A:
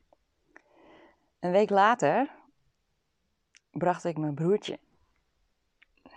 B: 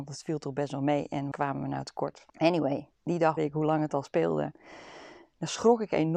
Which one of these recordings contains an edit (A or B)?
B